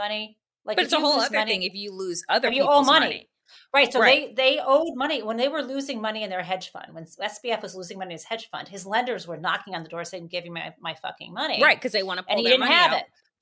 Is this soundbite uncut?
yes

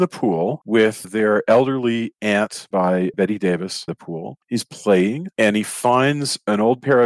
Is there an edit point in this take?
yes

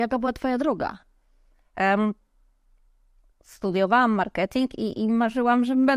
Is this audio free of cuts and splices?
yes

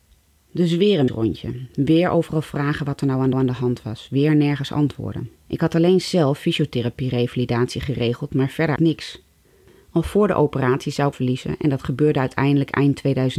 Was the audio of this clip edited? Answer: yes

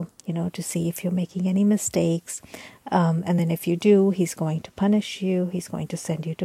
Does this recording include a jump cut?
no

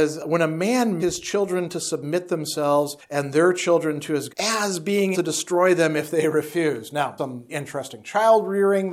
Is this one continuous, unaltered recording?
no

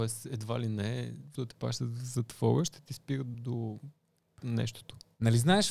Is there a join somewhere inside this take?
yes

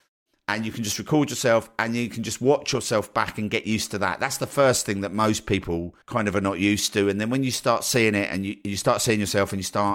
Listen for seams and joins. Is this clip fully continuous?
no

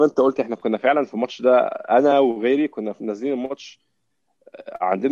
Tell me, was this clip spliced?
no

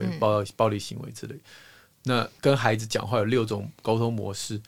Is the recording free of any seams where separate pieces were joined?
yes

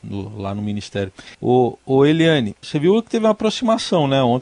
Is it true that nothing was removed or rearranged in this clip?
no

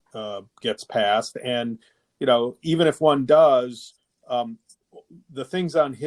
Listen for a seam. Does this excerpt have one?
no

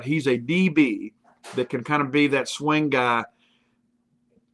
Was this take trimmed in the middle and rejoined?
no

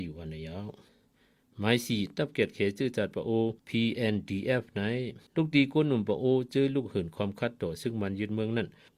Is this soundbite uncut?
no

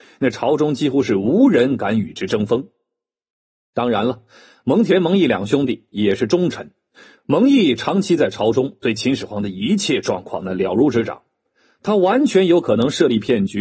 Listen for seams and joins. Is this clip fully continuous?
yes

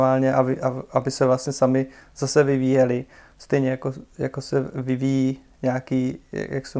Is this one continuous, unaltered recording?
yes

